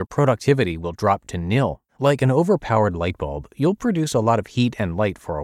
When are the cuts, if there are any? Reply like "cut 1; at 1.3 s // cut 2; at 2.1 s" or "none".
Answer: cut 1; at 1.9 s